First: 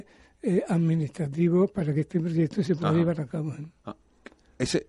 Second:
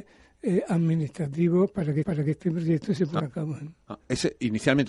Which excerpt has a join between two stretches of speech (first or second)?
second